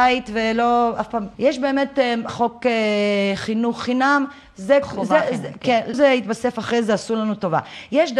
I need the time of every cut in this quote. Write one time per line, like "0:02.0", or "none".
0:01.3
0:02.3
0:05.9